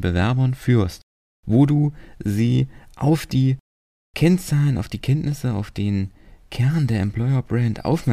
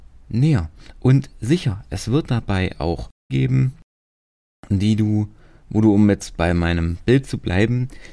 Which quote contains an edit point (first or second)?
second